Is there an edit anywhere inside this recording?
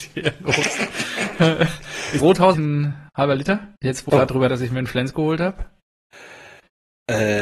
yes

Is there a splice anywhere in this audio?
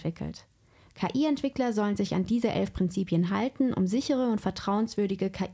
no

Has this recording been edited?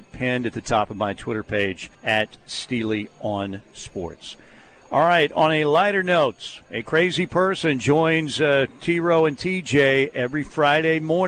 yes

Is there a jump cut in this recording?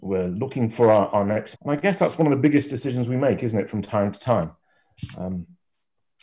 yes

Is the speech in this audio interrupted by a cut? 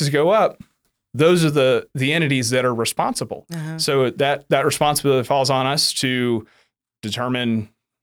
no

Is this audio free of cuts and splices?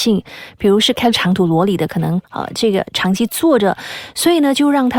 no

